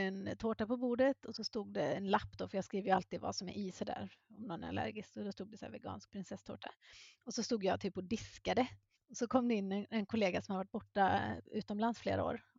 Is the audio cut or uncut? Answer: cut